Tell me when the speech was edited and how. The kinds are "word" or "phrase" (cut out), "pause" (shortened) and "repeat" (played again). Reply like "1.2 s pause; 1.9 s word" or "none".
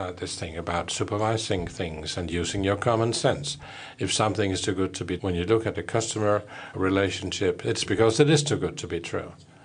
5.2 s word; 6.7 s word; 7.9 s word